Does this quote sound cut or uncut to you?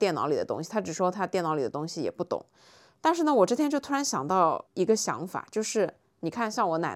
cut